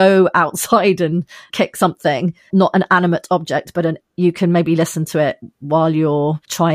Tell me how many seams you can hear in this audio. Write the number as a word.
one